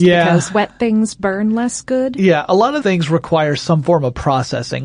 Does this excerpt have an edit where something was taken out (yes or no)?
yes